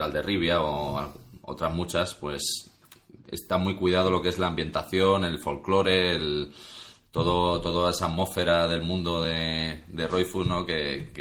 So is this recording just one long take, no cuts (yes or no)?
yes